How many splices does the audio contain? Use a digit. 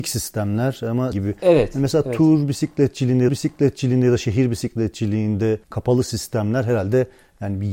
3